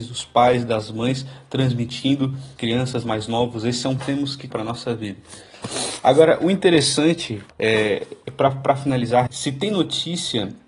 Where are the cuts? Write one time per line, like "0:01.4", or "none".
0:02.6
0:03.0
0:04.0
0:04.5
0:07.5
0:09.3